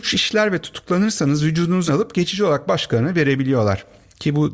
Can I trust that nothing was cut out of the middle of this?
no; 1 cut; at 1.9 s

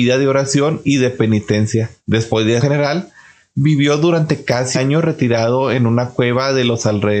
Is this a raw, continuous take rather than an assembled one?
no; 3 cuts; at 2.0 s, 2.6 s, 4.7 s

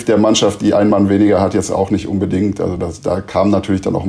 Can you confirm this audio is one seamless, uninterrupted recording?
yes; 0 cuts

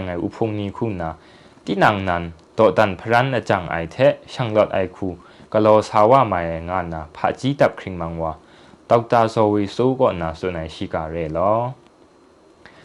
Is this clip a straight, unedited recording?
yes; 0 cuts

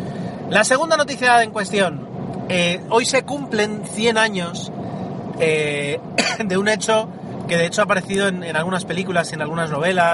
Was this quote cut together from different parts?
no; 0 cuts

